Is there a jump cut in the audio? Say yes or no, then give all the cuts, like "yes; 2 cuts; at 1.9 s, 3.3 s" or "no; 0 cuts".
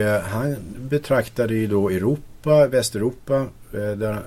no; 0 cuts